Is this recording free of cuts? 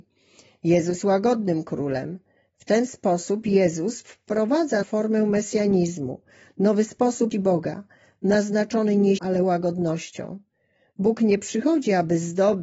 no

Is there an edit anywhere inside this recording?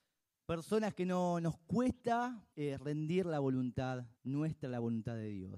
yes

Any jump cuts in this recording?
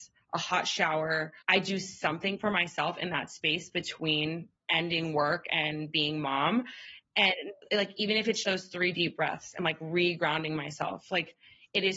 yes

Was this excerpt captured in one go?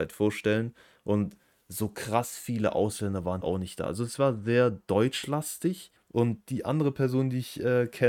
no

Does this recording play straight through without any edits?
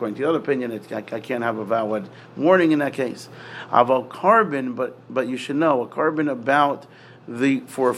yes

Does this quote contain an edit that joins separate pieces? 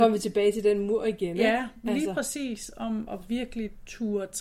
yes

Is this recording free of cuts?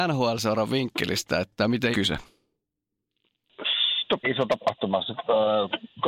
no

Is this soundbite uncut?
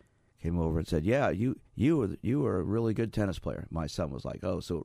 no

